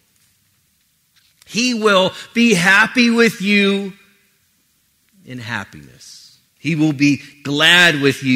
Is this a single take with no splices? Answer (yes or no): no